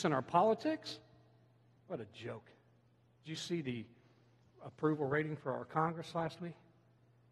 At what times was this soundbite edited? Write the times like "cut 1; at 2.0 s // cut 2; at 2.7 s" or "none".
none

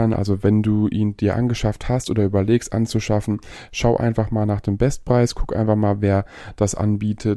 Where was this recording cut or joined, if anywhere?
none

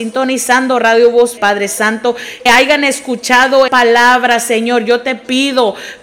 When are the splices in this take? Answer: cut 1; at 1.4 s // cut 2; at 2.5 s // cut 3; at 3.7 s

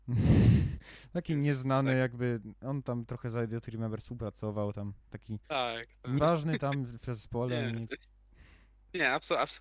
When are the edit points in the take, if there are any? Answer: cut 1; at 5.4 s // cut 2; at 6.2 s

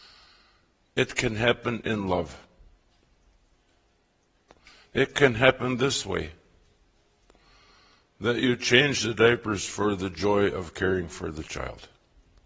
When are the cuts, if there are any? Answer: none

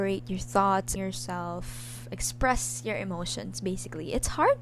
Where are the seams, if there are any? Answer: cut 1; at 1.0 s

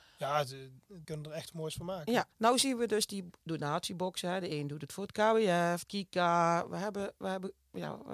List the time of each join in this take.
cut 1; at 1.0 s // cut 2; at 1.5 s // cut 3; at 2.3 s // cut 4; at 5.8 s

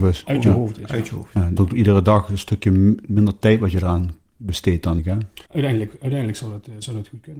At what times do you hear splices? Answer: cut 1; at 1.6 s // cut 2; at 5.0 s // cut 3; at 5.5 s

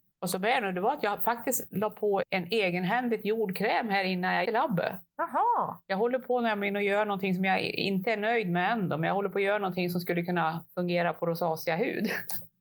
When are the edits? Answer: cut 1; at 2.2 s // cut 2; at 4.4 s

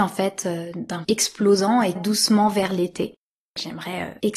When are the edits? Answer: cut 1; at 1.0 s // cut 2; at 2.0 s

